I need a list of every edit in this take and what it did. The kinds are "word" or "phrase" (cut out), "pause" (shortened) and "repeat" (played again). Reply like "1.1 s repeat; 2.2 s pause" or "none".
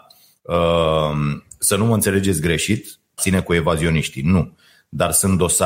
3.2 s word